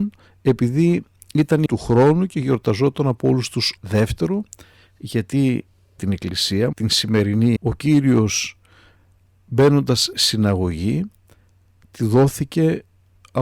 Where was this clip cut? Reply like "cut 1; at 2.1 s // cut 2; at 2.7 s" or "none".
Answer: cut 1; at 1.7 s // cut 2; at 3.8 s // cut 3; at 6.0 s // cut 4; at 6.7 s // cut 5; at 7.6 s // cut 6; at 10.1 s